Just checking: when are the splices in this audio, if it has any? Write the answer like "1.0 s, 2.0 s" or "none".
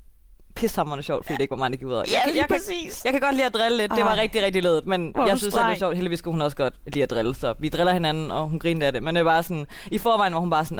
none